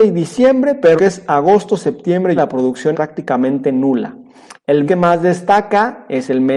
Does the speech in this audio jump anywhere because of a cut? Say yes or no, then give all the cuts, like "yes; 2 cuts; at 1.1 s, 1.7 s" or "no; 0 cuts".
yes; 4 cuts; at 1.0 s, 2.4 s, 2.9 s, 4.9 s